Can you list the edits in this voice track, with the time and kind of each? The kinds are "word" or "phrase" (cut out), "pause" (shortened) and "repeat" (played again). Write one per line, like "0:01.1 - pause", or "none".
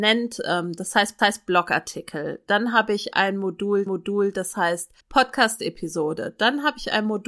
0:01.2 - repeat
0:03.9 - repeat
0:05.0 - pause